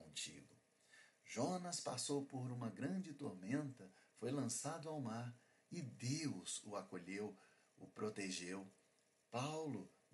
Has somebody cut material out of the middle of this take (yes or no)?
no